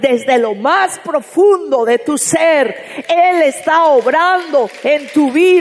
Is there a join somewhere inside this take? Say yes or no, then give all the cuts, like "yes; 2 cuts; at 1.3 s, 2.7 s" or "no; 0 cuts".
no; 0 cuts